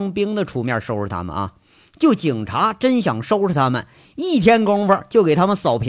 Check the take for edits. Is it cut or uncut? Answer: uncut